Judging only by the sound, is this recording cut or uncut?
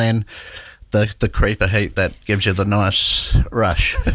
uncut